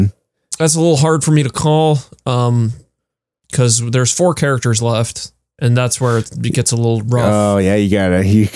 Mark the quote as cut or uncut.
uncut